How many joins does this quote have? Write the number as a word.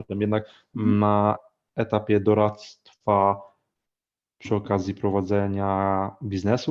zero